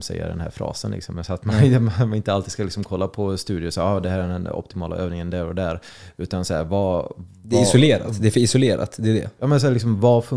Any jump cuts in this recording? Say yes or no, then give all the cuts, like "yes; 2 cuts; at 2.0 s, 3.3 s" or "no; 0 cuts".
no; 0 cuts